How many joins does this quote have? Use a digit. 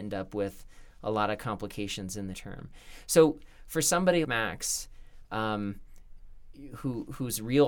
2